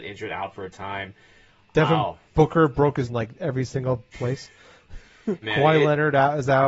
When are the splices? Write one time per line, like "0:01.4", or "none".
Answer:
0:03.1
0:04.1
0:05.4